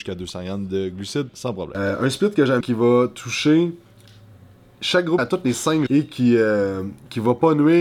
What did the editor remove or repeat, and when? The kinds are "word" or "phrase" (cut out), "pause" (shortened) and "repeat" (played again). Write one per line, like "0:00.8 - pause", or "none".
0:01.3 - word
0:02.6 - word
0:05.2 - word
0:05.9 - word

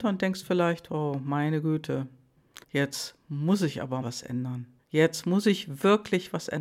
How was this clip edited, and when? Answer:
0:02.6 - pause
0:04.0 - word
0:04.8 - pause

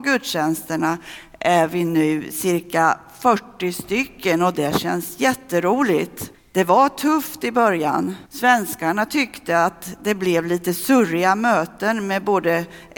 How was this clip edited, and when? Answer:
0:06.3 - pause
0:08.3 - pause

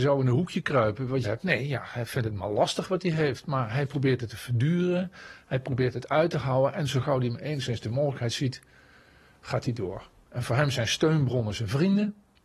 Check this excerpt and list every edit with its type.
0:01.2 - word

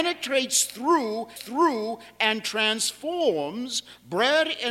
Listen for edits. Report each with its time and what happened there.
0:01.4 - repeat

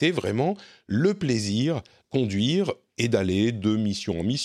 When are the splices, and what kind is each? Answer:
0:02.0 - word

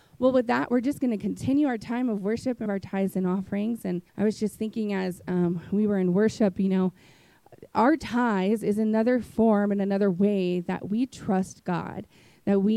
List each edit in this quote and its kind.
0:02.7 - phrase
0:04.1 - pause

